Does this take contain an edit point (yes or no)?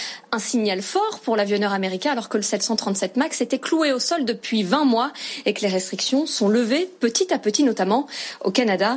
no